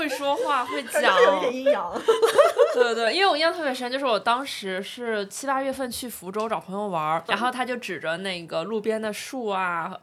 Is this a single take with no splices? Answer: no; 1 cut; at 7.3 s

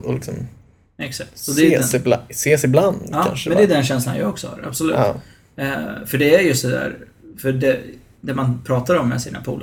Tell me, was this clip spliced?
no; 0 cuts

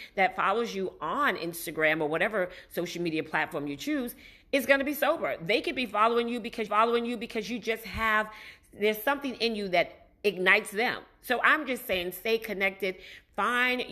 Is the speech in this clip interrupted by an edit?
yes; 1 cut; at 6.7 s

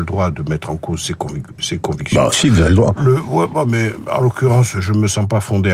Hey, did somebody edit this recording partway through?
no; 0 cuts

